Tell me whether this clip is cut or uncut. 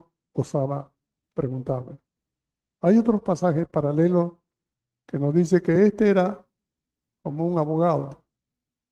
uncut